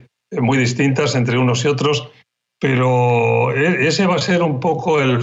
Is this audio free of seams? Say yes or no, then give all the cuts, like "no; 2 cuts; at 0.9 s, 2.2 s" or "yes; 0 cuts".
yes; 0 cuts